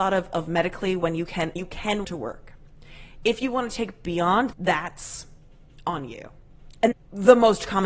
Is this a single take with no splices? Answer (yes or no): no